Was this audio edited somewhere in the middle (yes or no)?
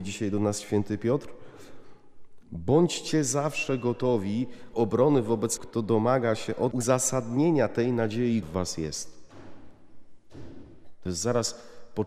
yes